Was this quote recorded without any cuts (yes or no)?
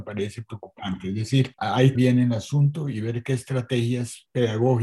no